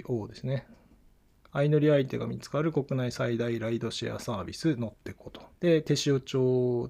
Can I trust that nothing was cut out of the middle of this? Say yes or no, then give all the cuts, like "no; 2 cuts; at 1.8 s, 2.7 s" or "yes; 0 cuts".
no; 1 cut; at 5.5 s